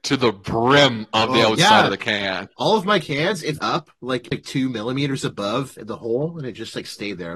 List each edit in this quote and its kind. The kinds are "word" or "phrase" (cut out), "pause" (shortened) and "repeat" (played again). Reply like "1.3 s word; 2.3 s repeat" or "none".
3.6 s word; 4.3 s word